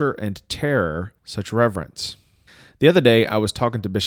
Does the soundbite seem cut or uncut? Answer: cut